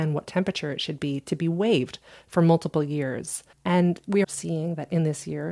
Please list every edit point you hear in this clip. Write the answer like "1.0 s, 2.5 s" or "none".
3.5 s, 4.2 s